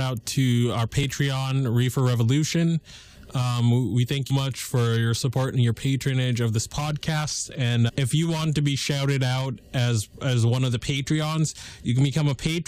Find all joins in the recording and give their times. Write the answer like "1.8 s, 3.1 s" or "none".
4.3 s, 7.9 s